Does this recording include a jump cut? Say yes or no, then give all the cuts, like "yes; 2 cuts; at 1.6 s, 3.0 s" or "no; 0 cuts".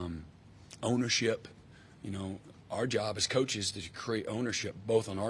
no; 0 cuts